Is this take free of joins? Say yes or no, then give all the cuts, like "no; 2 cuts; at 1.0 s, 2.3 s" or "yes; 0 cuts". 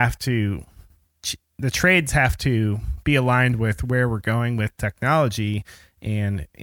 yes; 0 cuts